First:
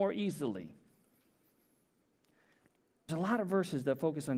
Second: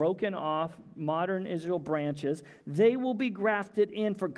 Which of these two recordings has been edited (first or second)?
first